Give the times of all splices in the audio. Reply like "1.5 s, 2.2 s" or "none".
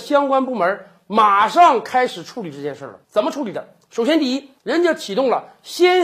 3.0 s, 4.6 s